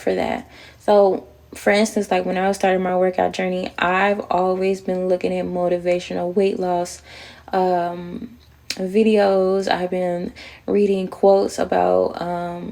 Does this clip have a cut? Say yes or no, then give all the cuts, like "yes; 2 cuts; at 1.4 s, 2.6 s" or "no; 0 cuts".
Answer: no; 0 cuts